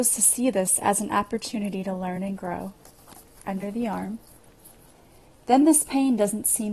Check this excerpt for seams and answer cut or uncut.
uncut